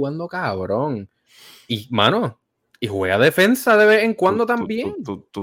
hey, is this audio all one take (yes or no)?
yes